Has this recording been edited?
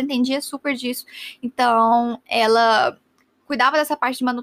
no; 0 cuts

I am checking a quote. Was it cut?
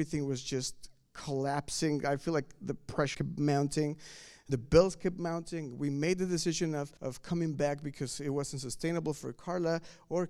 yes; 3 cuts; at 3.1 s, 4.5 s, 7.0 s

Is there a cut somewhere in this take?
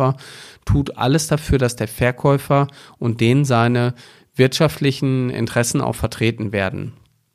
no; 0 cuts

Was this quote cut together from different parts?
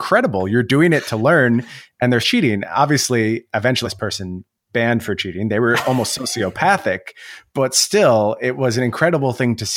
yes; 2 cuts; at 2.2 s, 3.8 s

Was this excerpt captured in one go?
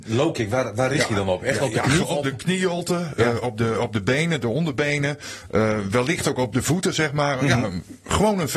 no; 1 cut; at 2.0 s

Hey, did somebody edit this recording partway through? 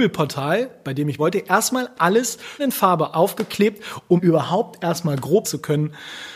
yes; 5 cuts; at 1.2 s, 2.6 s, 3.1 s, 4.2 s, 5.4 s

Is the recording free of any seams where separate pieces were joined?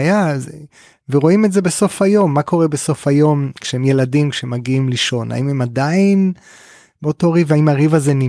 yes; 0 cuts

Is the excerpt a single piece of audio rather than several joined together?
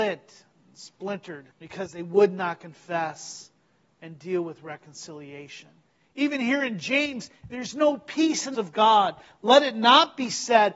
no; 3 cuts; at 1.5 s, 5.9 s, 8.5 s

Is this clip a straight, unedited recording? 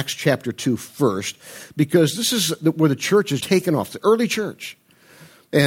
no; 1 cut; at 3.4 s

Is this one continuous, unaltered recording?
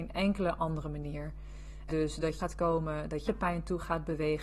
no; 3 cuts; at 1.9 s, 2.4 s, 3.3 s

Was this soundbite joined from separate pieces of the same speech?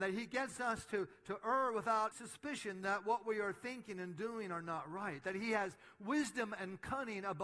yes; 1 cut; at 2.1 s

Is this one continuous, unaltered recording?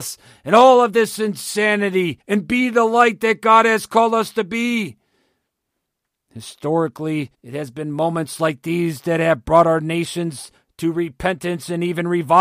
no; 2 cuts; at 2.2 s, 7.3 s

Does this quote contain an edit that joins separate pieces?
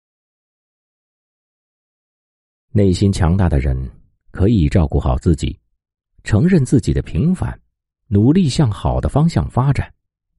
no; 0 cuts

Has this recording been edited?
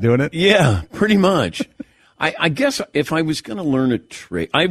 no; 0 cuts

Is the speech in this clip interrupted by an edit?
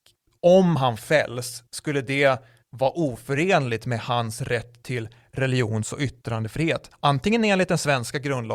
no; 0 cuts

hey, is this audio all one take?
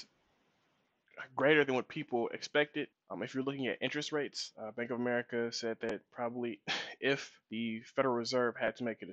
no; 2 cuts; at 2.9 s, 7.4 s

